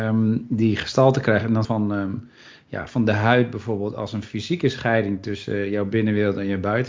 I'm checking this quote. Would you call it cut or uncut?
cut